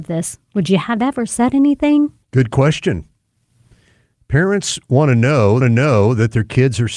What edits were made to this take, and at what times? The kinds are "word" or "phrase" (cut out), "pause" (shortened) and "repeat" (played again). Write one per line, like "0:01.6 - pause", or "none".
0:02.2 - pause
0:05.6 - repeat